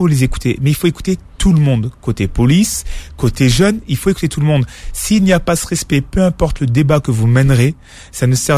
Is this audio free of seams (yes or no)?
no